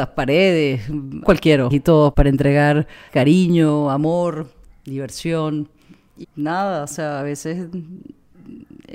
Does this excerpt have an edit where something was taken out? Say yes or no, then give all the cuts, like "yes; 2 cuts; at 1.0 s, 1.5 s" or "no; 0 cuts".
yes; 5 cuts; at 1.2 s, 1.7 s, 2.1 s, 3.1 s, 6.2 s